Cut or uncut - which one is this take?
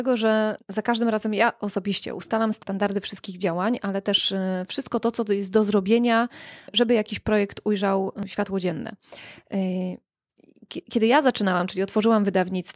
uncut